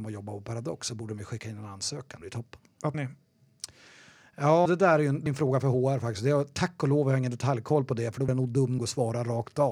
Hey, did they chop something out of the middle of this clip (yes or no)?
yes